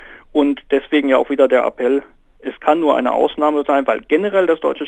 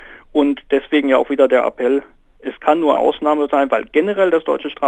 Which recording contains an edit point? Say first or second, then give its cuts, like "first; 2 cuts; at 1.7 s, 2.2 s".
second; 1 cut; at 3.0 s